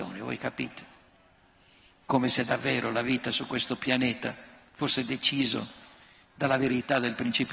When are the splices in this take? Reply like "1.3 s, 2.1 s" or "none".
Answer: none